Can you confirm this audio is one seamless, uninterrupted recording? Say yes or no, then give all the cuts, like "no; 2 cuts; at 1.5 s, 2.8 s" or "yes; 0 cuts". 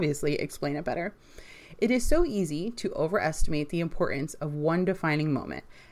yes; 0 cuts